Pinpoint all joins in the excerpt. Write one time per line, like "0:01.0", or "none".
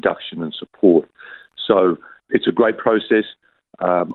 0:02.2